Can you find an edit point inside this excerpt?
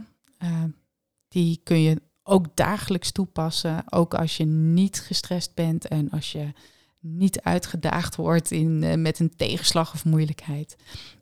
no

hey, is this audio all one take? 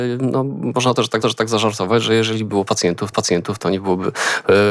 no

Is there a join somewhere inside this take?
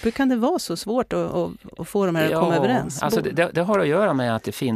no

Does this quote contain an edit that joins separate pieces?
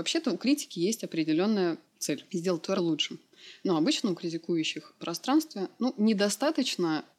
yes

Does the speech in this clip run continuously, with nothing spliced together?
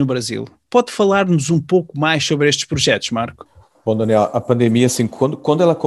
yes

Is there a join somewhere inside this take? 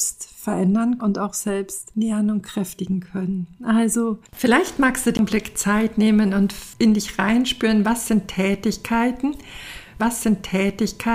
yes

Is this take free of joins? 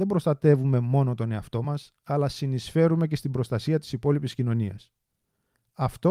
yes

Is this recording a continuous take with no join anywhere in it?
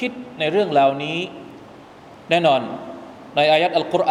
yes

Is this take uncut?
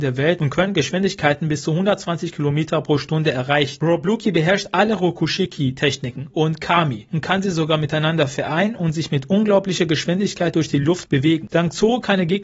no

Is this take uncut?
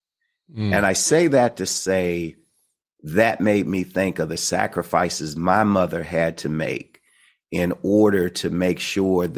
yes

